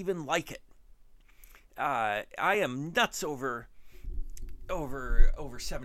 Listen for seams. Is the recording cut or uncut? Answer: uncut